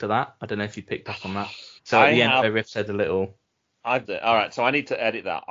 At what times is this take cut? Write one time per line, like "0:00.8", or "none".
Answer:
0:01.8
0:02.9
0:04.0